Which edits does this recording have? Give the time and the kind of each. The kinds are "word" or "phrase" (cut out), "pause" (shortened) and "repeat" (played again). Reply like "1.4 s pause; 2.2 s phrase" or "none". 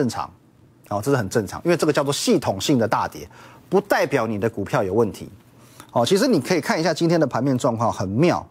none